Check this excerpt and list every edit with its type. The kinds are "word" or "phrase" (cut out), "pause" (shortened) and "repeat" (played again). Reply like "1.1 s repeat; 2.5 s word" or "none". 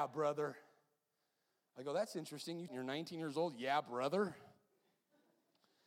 2.7 s phrase